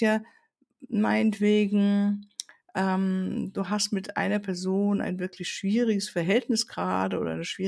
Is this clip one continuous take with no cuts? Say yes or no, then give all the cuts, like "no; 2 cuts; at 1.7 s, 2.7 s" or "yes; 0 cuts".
yes; 0 cuts